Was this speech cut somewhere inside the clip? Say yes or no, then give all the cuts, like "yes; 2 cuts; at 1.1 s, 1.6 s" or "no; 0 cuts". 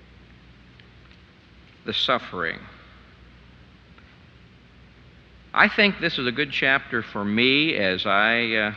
no; 0 cuts